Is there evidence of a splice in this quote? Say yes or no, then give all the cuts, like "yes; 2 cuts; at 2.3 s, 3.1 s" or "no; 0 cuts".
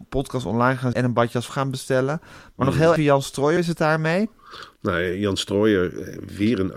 yes; 4 cuts; at 0.9 s, 1.5 s, 3.0 s, 3.6 s